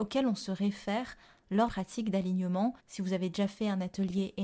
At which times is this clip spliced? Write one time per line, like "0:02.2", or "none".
0:01.7
0:02.8